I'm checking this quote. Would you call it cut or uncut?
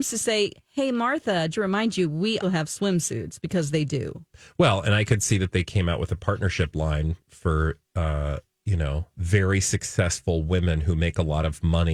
cut